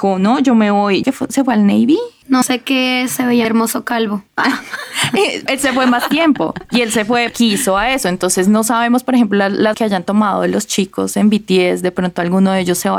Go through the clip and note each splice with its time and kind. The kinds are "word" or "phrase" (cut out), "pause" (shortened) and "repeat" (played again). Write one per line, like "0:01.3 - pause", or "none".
0:01.0 - word
0:02.4 - phrase
0:03.4 - word
0:05.5 - word
0:07.3 - word
0:09.7 - phrase